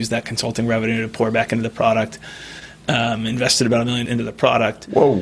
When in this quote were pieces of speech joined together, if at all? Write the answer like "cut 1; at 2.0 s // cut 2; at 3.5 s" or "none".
cut 1; at 4.1 s